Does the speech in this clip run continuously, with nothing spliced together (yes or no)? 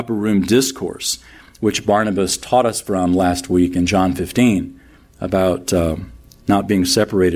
yes